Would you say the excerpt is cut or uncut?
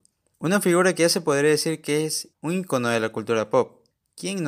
cut